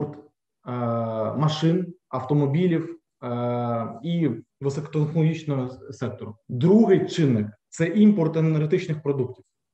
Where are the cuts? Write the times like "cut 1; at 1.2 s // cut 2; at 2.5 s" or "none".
cut 1; at 4.5 s // cut 2; at 6.4 s

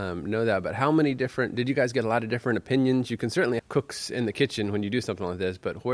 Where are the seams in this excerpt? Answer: cut 1; at 3.6 s

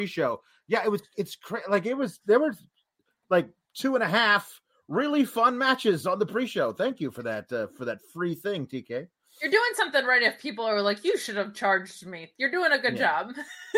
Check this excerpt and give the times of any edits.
none

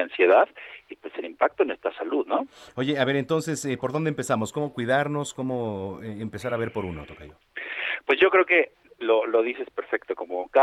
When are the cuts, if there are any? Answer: none

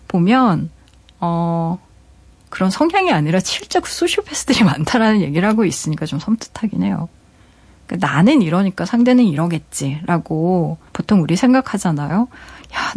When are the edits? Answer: cut 1; at 10.9 s

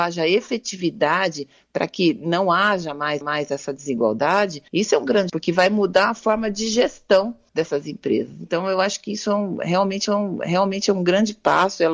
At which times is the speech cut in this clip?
cut 1; at 3.2 s // cut 2; at 4.7 s // cut 3; at 5.3 s // cut 4; at 7.5 s // cut 5; at 10.0 s

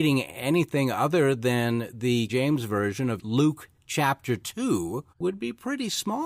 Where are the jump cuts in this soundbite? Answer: cut 1; at 2.3 s // cut 2; at 5.1 s

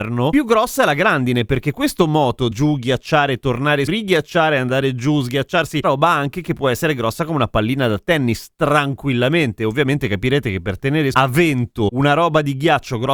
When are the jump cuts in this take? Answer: cut 1; at 2.5 s // cut 2; at 3.9 s // cut 3; at 5.8 s // cut 4; at 11.1 s

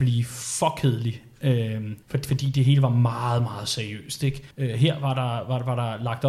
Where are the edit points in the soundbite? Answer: cut 1; at 2.0 s // cut 2; at 4.5 s

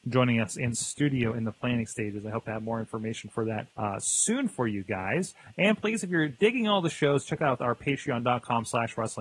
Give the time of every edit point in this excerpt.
cut 1; at 3.7 s

